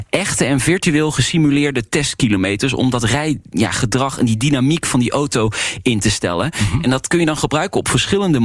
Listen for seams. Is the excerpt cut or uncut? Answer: uncut